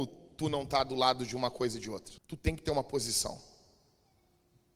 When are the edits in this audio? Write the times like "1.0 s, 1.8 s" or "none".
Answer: 2.2 s